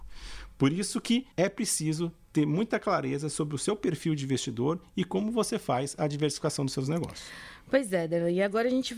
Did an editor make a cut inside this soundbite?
yes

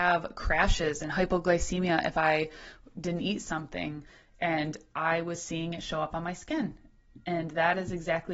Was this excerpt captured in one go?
yes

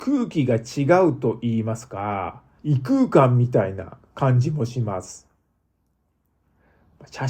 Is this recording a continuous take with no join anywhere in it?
yes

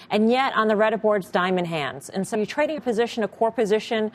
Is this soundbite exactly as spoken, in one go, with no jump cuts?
no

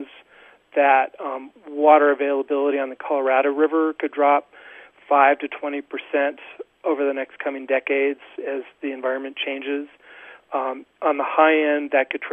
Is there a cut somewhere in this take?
no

